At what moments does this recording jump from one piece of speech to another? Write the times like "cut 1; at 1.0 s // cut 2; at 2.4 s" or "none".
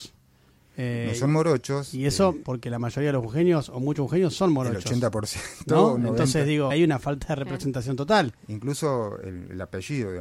cut 1; at 2.4 s // cut 2; at 6.7 s

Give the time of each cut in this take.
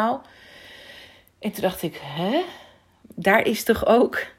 none

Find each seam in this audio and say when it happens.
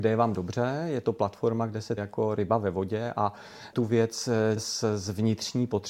cut 1; at 2.0 s // cut 2; at 3.7 s // cut 3; at 4.6 s

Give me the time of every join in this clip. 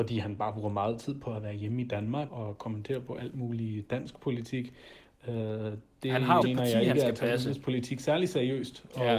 cut 1; at 2.3 s // cut 2; at 6.4 s

